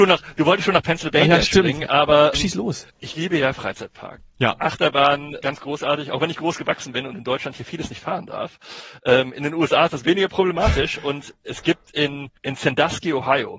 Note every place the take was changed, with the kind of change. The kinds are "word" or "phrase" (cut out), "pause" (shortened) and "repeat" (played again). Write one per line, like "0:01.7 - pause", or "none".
0:02.3 - word
0:05.4 - word
0:12.4 - pause